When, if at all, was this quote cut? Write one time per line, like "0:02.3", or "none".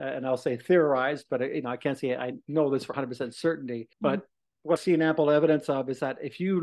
0:02.9
0:03.9
0:04.8